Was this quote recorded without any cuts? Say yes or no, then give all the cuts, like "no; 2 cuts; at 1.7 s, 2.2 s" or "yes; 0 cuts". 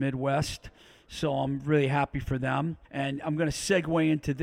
no; 1 cut; at 2.8 s